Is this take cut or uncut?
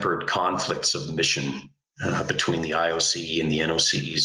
uncut